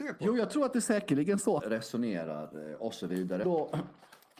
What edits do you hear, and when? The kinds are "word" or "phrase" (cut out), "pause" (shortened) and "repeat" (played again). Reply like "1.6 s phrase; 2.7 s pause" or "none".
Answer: 1.6 s word; 3.4 s word